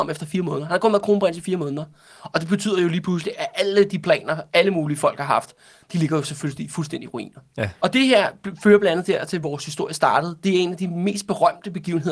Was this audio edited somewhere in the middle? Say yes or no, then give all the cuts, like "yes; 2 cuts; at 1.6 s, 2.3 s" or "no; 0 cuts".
no; 0 cuts